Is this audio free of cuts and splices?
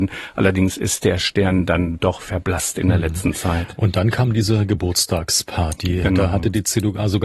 yes; 0 cuts

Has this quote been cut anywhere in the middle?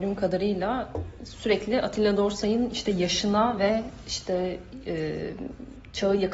no; 0 cuts

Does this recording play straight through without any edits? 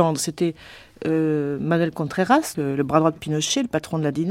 no; 1 cut; at 2.5 s

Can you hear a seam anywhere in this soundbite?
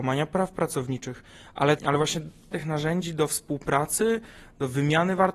yes; 2 cuts; at 1.8 s, 2.5 s

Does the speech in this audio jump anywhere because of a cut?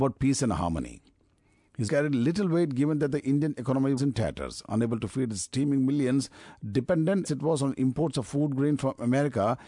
yes; 3 cuts; at 1.9 s, 4.0 s, 7.2 s

